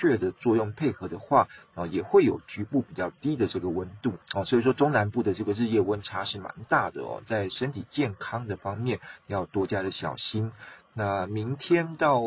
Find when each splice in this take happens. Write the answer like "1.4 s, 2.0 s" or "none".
4.2 s